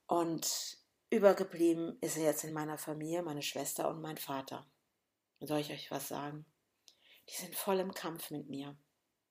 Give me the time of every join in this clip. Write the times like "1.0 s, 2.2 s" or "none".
none